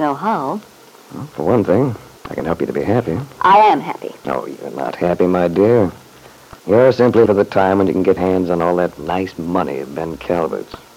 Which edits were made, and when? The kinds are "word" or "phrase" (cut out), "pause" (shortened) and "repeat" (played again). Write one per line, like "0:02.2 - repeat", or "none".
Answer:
0:02.2 - pause
0:06.6 - pause
0:07.3 - word
0:08.2 - word